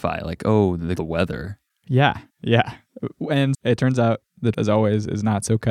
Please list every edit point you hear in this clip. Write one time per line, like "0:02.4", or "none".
0:01.0
0:02.3
0:03.5
0:04.5